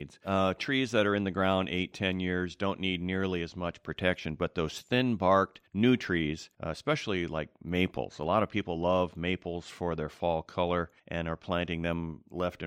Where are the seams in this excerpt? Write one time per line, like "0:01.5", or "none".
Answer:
0:05.7
0:06.5
0:11.0